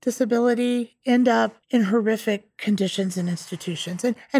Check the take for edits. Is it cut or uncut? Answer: cut